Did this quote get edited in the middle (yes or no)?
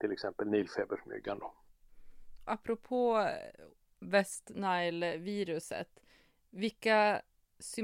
yes